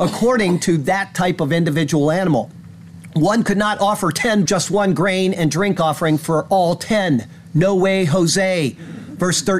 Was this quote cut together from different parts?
yes; 1 cut; at 4.5 s

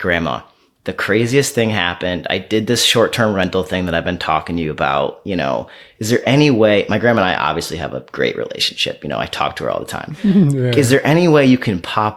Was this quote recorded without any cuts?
yes; 0 cuts

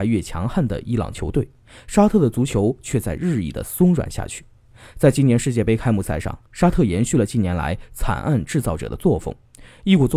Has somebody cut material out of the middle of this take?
yes; 1 cut; at 6.5 s

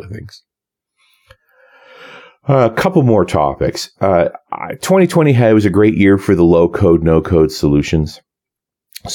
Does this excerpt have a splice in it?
no; 0 cuts

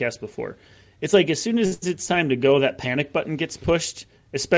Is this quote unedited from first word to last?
yes; 0 cuts

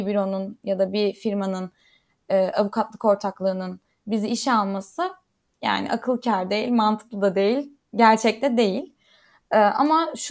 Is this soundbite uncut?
yes; 0 cuts

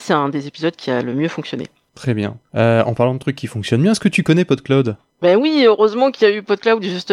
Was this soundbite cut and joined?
no; 0 cuts

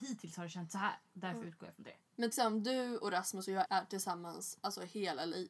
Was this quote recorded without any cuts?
no; 2 cuts; at 2.3 s, 3.6 s

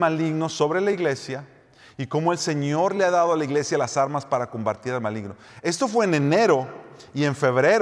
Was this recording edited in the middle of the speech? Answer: no; 0 cuts

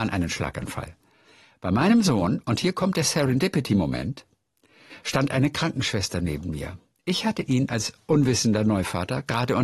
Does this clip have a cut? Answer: no; 0 cuts

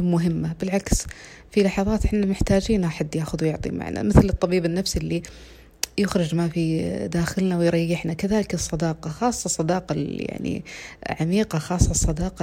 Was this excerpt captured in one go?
yes; 0 cuts

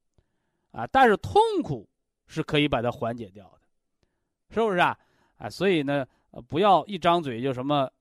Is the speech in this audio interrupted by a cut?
no; 0 cuts

